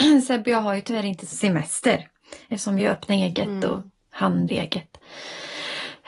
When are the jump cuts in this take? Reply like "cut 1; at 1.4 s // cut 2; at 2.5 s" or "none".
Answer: cut 1; at 1.3 s // cut 2; at 2.8 s // cut 3; at 4.5 s